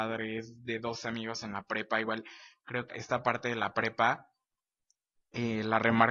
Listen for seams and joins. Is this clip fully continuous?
no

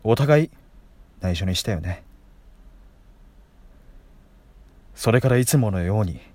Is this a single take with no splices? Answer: no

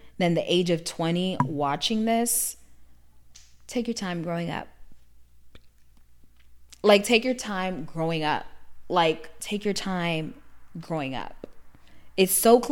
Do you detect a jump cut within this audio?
no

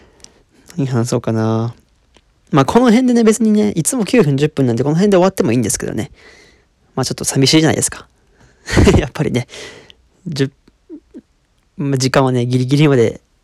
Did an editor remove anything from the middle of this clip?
no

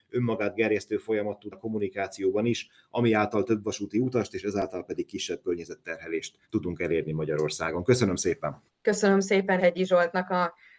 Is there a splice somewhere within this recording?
yes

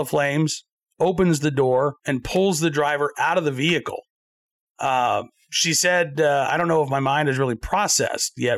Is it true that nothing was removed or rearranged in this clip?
no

